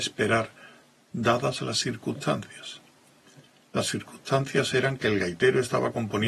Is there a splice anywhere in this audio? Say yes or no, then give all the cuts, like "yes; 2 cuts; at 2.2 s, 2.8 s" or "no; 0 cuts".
no; 0 cuts